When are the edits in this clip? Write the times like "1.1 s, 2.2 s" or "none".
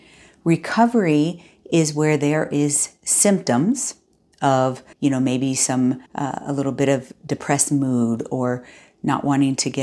4.9 s, 6.1 s